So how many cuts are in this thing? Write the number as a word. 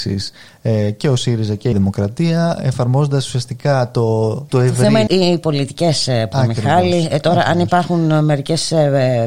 four